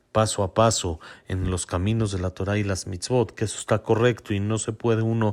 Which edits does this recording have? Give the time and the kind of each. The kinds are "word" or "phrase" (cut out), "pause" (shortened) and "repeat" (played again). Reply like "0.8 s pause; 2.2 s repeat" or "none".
none